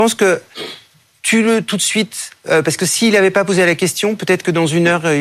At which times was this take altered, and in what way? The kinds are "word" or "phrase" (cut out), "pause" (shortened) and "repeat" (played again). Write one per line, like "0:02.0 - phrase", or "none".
none